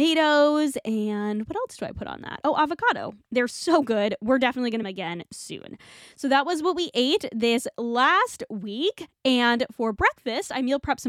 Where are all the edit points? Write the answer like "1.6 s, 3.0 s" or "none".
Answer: 4.8 s